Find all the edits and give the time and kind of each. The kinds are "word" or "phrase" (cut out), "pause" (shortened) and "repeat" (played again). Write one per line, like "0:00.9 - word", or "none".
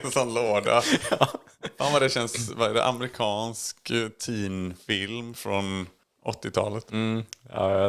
none